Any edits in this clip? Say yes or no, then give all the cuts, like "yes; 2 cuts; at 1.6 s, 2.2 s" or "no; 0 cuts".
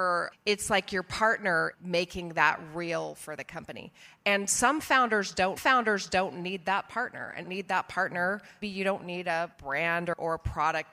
yes; 5 cuts; at 1.7 s, 5.6 s, 7.4 s, 8.6 s, 9.5 s